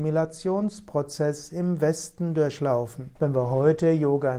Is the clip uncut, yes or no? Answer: no